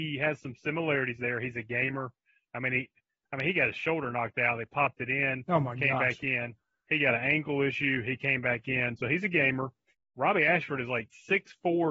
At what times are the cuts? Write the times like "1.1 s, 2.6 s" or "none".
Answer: none